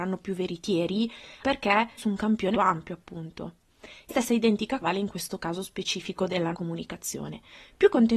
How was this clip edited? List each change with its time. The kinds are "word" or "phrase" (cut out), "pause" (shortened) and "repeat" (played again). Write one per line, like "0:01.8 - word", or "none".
0:01.4 - word
0:02.0 - word
0:02.5 - word
0:04.1 - word
0:04.8 - word
0:06.5 - word